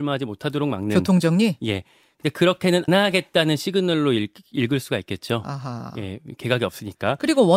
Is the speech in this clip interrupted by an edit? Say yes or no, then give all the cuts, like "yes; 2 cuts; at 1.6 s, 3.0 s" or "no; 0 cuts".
yes; 1 cut; at 2.9 s